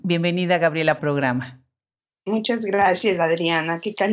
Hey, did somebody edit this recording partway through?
yes; 1 cut; at 1.0 s

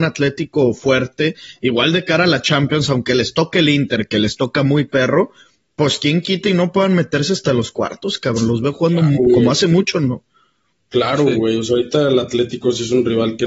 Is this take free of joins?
yes; 0 cuts

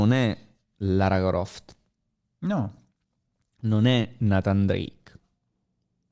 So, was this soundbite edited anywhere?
no; 0 cuts

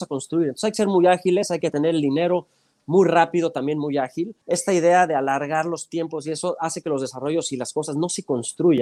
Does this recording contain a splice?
yes; 1 cut; at 4.4 s

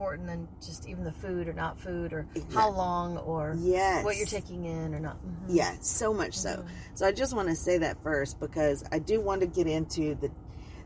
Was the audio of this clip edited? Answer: no; 0 cuts

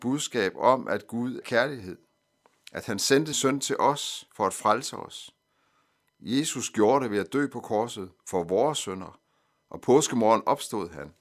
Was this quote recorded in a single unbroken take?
no; 2 cuts; at 1.4 s, 3.3 s

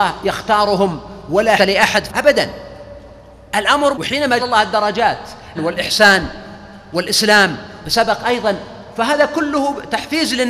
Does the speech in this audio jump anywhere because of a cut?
yes; 6 cuts; at 1.6 s, 2.1 s, 3.9 s, 4.4 s, 5.6 s, 7.8 s

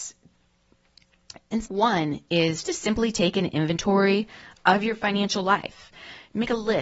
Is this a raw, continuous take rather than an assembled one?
no; 2 cuts; at 1.7 s, 2.6 s

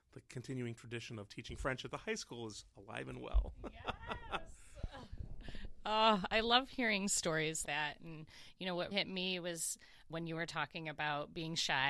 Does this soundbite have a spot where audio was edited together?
yes; 3 cuts; at 7.6 s, 8.9 s, 10.1 s

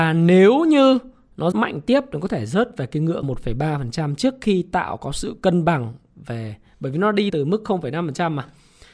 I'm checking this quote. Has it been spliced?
yes; 3 cuts; at 1.5 s, 3.2 s, 7.3 s

